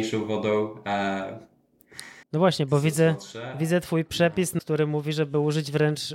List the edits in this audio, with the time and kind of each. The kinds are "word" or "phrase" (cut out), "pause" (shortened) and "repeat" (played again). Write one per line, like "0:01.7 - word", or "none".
0:02.2 - pause
0:04.6 - word